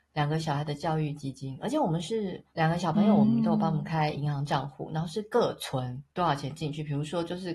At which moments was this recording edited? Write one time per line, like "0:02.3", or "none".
0:02.5
0:06.1